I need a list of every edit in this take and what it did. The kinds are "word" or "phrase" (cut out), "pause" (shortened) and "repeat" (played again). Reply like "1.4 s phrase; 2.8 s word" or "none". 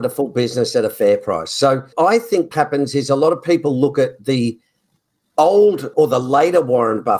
1.9 s word; 2.5 s word